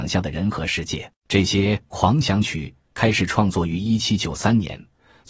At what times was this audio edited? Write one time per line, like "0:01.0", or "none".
0:01.2